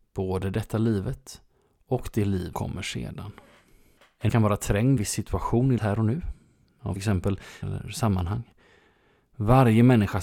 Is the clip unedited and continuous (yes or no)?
no